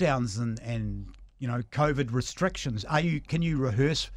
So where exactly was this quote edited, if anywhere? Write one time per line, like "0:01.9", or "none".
none